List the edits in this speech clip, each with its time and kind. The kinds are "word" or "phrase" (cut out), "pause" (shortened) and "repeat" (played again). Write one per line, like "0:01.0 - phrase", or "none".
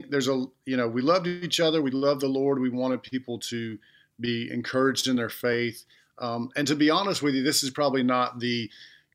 none